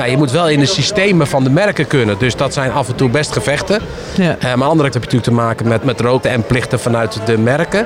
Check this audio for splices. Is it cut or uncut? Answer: cut